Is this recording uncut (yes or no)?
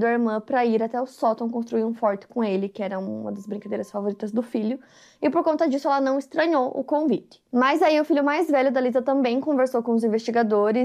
yes